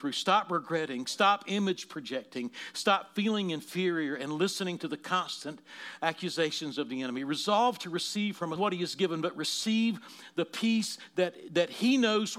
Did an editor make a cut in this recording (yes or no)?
yes